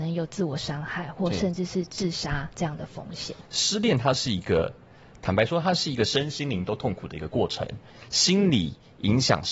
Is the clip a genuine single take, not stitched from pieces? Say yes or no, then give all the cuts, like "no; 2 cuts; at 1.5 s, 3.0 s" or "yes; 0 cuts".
yes; 0 cuts